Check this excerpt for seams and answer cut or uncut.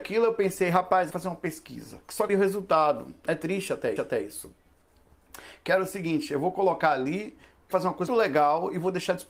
cut